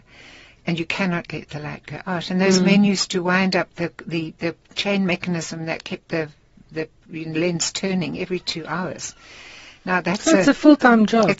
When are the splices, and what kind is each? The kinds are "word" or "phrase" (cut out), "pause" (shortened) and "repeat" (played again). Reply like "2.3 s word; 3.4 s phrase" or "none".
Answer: none